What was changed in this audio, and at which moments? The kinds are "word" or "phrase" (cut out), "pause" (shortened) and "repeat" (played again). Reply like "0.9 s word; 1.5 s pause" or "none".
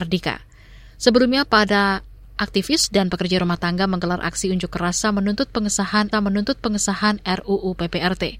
6.1 s repeat